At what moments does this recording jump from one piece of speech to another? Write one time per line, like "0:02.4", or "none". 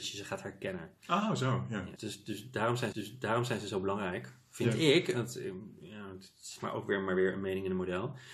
0:02.0
0:02.9